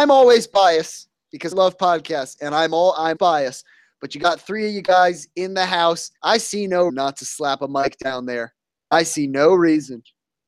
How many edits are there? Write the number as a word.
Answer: five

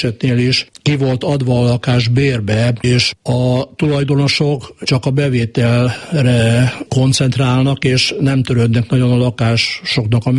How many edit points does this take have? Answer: one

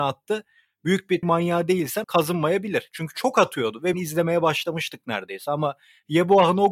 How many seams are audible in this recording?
three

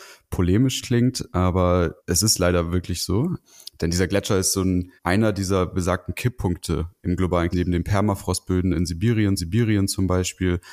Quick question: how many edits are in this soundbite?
four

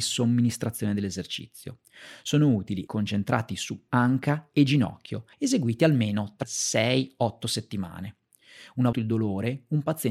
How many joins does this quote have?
five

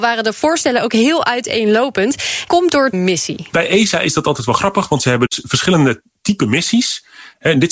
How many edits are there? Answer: three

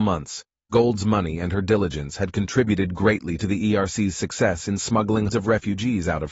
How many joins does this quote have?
one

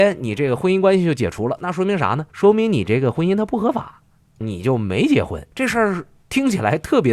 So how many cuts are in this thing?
three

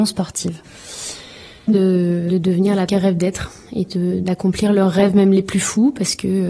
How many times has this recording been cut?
two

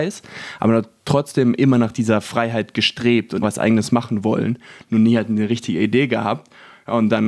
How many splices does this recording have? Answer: one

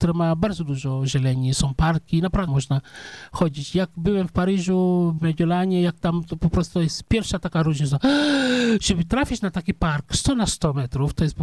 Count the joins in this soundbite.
two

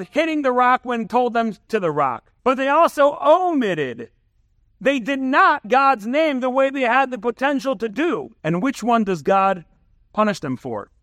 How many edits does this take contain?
five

